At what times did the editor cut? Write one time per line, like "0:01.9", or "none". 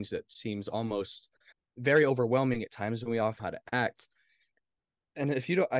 0:01.5
0:03.4